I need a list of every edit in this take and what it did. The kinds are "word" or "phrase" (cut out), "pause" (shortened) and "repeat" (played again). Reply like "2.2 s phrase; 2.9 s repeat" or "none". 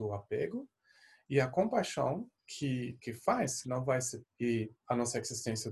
2.4 s pause; 3.6 s phrase; 4.2 s word; 4.8 s pause